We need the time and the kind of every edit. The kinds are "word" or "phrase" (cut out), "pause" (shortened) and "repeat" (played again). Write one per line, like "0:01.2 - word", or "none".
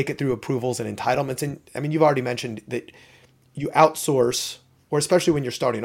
none